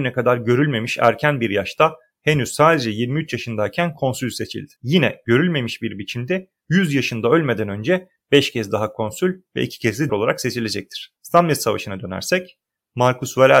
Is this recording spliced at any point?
yes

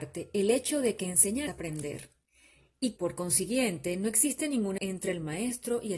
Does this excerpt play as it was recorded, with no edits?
no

